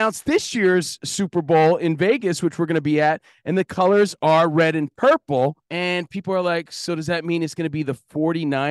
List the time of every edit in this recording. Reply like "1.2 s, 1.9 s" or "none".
5.6 s